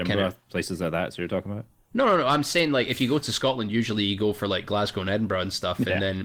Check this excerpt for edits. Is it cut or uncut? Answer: uncut